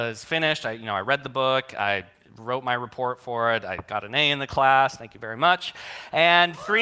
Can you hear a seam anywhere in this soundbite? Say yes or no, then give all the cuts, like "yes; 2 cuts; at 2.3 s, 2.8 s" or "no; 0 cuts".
no; 0 cuts